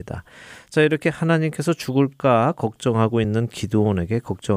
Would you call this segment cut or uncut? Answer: uncut